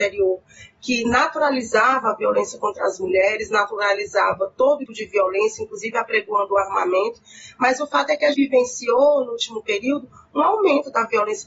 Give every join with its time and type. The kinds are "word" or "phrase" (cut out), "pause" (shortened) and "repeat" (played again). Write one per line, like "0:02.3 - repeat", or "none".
0:04.9 - word
0:08.3 - word